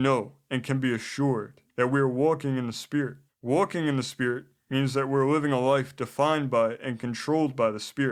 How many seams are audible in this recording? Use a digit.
2